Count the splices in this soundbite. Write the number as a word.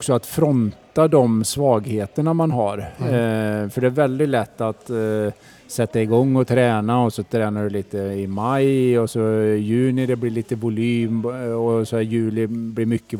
zero